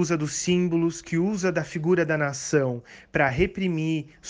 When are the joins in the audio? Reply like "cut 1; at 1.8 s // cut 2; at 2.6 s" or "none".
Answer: none